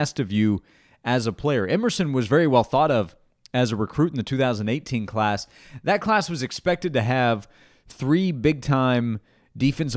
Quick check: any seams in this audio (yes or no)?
no